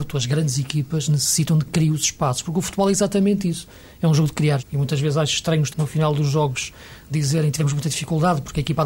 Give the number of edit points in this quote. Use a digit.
3